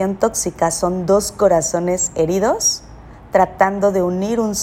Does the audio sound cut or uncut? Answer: uncut